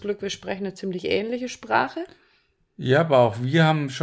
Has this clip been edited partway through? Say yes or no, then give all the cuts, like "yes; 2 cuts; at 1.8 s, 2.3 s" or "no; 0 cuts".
no; 0 cuts